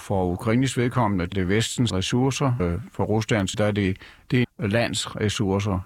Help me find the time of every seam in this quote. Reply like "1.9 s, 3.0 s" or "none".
1.3 s, 1.9 s, 2.6 s, 3.5 s, 4.4 s